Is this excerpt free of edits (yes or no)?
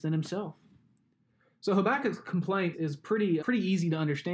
no